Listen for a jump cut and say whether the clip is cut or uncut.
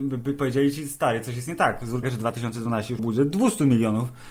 cut